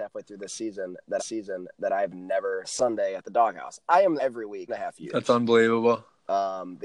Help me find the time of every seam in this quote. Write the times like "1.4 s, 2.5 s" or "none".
1.2 s, 2.6 s, 4.2 s, 4.7 s